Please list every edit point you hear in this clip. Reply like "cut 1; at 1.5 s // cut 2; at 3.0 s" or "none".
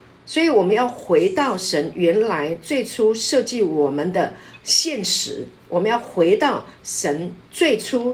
cut 1; at 5.6 s